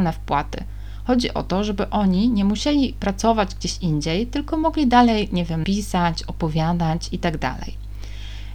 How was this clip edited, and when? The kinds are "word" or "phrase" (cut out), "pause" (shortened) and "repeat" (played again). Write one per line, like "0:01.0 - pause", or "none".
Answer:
0:05.6 - word